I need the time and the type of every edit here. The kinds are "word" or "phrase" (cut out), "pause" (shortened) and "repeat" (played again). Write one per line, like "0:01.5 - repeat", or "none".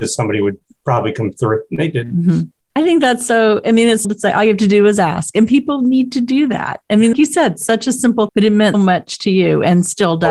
0:04.0 - phrase
0:07.1 - phrase
0:08.3 - word
0:08.7 - word